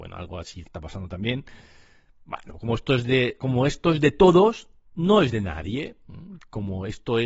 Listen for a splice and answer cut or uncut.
uncut